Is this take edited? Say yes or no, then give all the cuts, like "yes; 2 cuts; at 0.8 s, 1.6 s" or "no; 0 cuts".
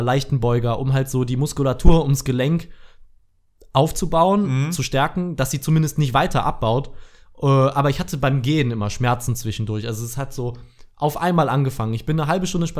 no; 0 cuts